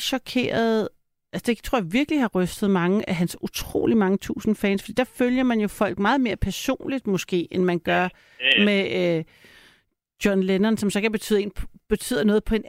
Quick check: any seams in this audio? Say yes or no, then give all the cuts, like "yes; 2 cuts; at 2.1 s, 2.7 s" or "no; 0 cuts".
no; 0 cuts